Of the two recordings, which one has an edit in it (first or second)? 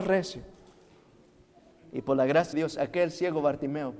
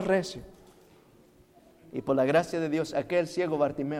first